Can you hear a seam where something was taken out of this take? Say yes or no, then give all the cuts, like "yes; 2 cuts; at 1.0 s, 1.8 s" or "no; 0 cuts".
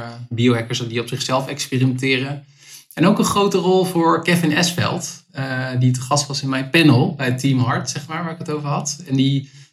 no; 0 cuts